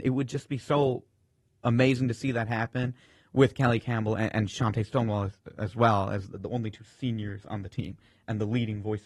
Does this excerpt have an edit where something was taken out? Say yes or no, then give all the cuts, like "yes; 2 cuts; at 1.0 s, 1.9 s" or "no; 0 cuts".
no; 0 cuts